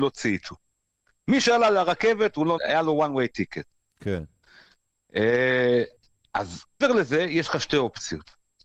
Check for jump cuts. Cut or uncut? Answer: cut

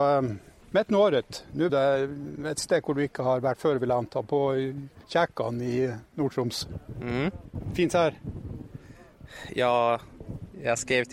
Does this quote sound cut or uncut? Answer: cut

